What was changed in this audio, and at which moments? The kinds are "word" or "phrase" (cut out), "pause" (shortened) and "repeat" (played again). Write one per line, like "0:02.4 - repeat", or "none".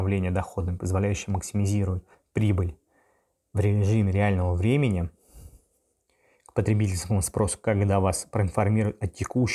0:02.1 - pause